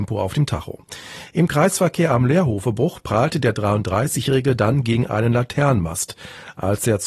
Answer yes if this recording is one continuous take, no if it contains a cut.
yes